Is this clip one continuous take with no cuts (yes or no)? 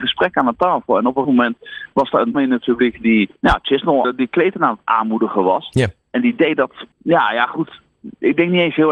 no